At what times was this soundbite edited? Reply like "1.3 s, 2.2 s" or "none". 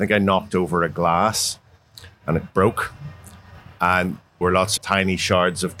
4.4 s, 4.8 s